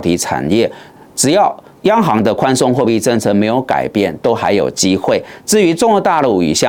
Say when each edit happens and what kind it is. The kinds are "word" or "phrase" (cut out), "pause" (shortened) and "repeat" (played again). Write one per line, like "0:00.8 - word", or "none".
none